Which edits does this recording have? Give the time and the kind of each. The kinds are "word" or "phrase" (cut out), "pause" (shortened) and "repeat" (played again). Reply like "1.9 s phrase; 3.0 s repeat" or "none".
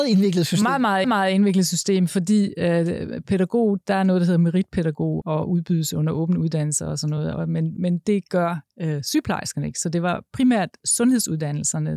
1.0 s repeat; 5.2 s word; 7.8 s word